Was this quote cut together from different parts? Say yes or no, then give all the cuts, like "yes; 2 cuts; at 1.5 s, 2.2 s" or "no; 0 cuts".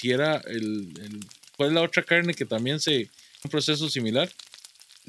yes; 1 cut; at 3.4 s